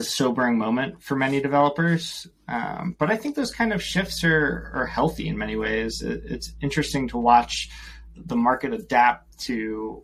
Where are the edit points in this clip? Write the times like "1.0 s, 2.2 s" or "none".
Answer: none